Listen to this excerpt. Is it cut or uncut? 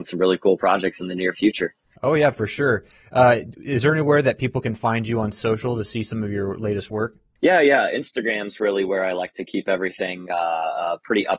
uncut